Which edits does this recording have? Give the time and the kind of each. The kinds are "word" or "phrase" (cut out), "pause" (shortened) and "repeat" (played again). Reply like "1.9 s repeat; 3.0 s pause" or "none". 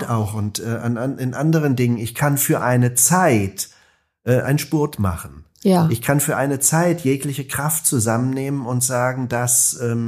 none